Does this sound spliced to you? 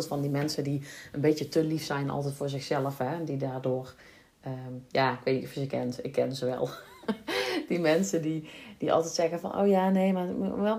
no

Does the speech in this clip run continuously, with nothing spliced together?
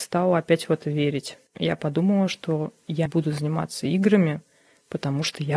no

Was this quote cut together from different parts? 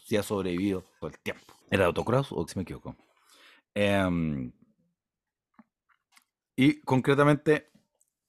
yes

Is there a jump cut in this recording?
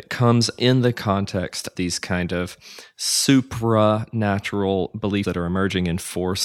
yes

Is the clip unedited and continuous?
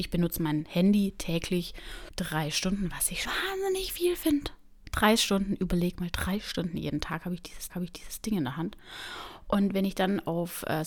no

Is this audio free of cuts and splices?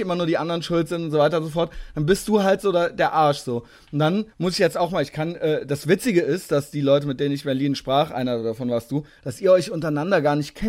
no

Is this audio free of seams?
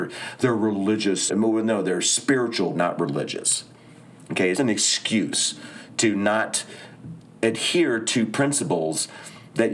no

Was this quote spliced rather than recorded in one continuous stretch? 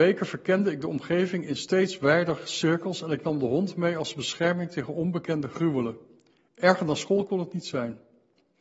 no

